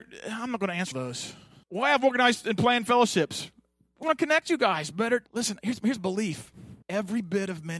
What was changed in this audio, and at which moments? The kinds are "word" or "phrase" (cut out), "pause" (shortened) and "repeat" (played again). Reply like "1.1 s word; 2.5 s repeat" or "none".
0.9 s word; 1.6 s pause; 4.0 s word; 5.3 s pause; 6.0 s word; 6.8 s pause